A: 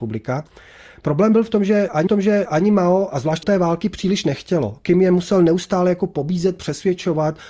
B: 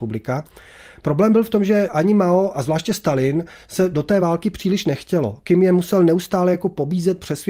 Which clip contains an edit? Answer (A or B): A